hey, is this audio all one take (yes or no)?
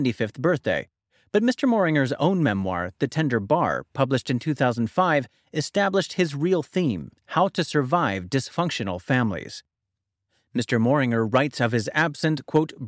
yes